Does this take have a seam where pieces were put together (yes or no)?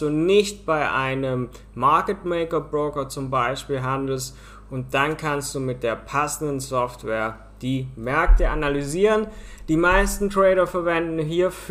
no